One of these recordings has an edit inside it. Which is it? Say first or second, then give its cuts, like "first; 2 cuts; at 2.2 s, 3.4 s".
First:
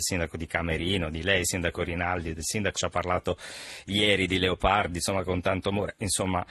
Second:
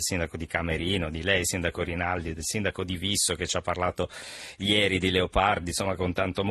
first; 1 cut; at 2.8 s